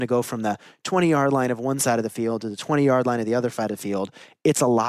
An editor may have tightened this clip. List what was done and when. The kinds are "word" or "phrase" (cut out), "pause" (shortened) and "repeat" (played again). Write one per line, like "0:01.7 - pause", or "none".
none